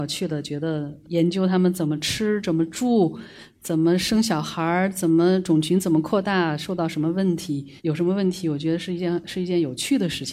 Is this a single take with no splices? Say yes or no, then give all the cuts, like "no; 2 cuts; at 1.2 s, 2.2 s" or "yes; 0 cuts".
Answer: no; 2 cuts; at 1.0 s, 7.8 s